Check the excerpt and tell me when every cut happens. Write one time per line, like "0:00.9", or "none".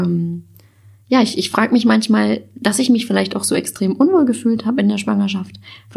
none